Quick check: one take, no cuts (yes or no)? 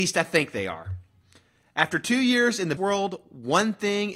no